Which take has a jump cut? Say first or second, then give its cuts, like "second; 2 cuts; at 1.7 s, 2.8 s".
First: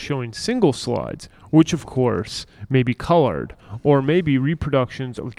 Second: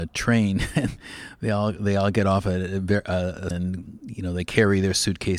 second; 1 cut; at 3.5 s